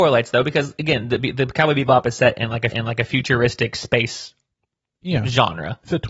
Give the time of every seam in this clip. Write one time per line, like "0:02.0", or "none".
0:02.7